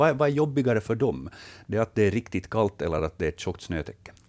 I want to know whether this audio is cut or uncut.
uncut